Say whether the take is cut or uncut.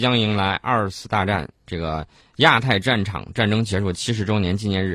cut